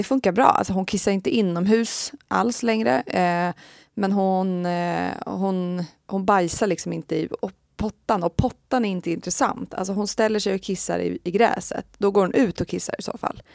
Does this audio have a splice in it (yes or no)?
no